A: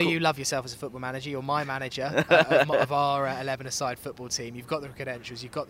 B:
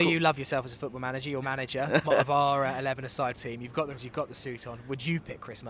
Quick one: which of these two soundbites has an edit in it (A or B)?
B